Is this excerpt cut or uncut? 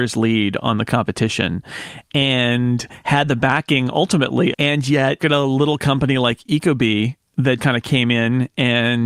cut